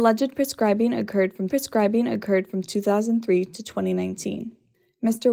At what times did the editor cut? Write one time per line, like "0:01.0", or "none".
0:01.5